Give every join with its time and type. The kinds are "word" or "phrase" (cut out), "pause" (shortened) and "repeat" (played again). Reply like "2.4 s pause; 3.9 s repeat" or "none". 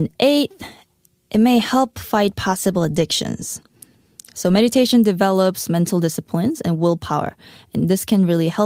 none